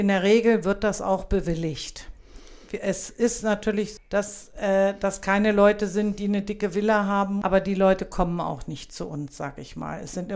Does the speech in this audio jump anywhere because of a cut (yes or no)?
yes